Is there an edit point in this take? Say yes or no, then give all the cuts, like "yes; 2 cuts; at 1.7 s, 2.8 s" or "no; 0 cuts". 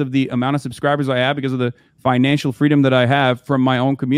no; 0 cuts